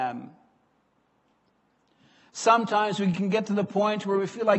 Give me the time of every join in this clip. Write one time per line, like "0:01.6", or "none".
none